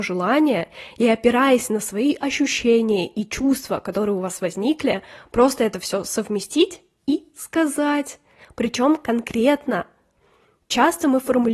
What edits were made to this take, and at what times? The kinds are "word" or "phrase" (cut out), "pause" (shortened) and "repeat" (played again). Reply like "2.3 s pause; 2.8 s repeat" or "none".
none